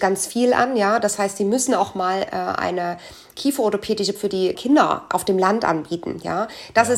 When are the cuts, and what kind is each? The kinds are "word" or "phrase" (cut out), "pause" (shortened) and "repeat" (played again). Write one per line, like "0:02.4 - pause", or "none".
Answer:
0:04.2 - word
0:04.6 - word